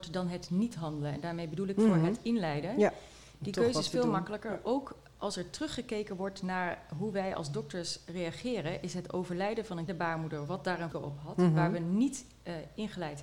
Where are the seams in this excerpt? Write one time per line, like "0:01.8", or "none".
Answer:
0:09.9
0:10.9